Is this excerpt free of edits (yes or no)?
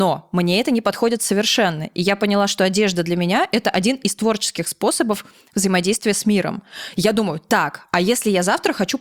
yes